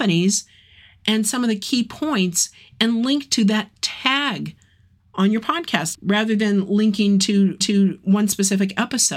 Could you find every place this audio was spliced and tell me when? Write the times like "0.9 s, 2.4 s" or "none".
5.9 s, 7.6 s

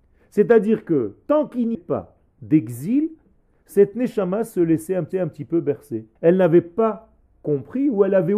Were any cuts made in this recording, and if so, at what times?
1.7 s, 5.1 s, 6.2 s

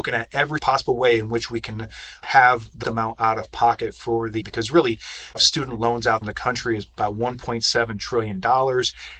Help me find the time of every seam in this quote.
2.8 s, 4.4 s, 5.3 s, 6.2 s

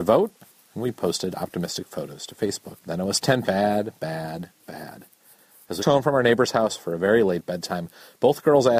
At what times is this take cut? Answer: 2.8 s, 3.4 s, 5.8 s

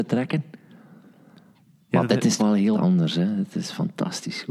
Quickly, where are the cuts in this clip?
2.4 s, 2.7 s

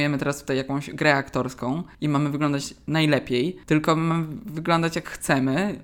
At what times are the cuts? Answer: 1.9 s, 3.6 s

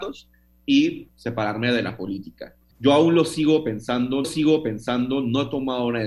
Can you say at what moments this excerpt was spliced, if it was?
2.7 s, 4.2 s

